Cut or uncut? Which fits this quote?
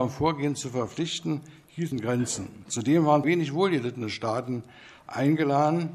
cut